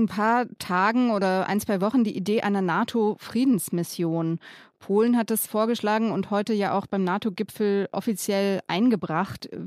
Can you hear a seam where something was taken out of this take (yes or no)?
no